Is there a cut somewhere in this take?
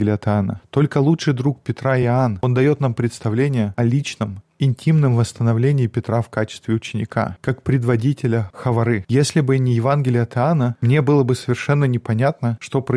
no; 0 cuts

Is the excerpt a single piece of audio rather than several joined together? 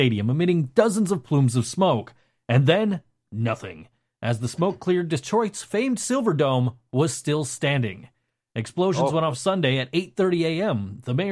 yes; 0 cuts

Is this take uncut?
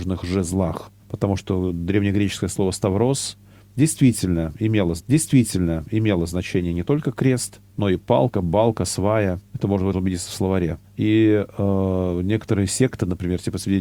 no; 6 cuts; at 1.0 s, 5.0 s, 7.7 s, 9.5 s, 9.9 s, 10.8 s

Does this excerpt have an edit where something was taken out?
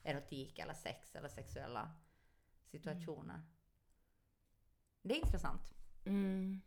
no; 0 cuts

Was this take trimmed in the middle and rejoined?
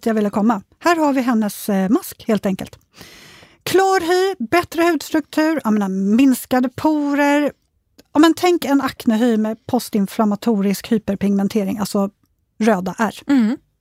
no; 0 cuts

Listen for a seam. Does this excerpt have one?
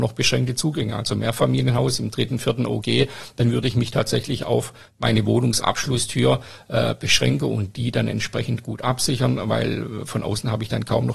no; 0 cuts

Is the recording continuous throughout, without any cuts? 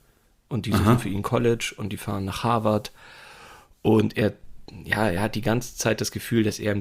yes; 0 cuts

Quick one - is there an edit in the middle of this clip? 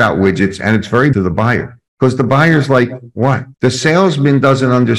yes; 4 cuts; at 1.1 s, 1.9 s, 3.1 s, 3.5 s

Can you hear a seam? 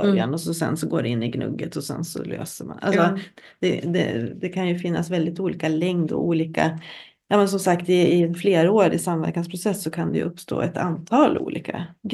no; 0 cuts

